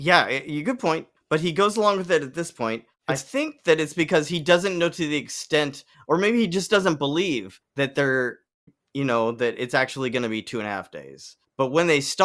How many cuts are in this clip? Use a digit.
0